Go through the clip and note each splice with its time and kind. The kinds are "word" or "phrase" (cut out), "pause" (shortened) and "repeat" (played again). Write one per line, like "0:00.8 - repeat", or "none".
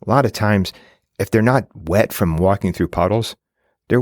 none